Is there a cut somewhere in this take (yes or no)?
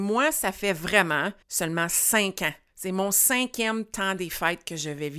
yes